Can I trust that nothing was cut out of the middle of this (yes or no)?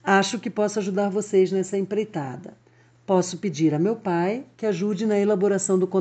yes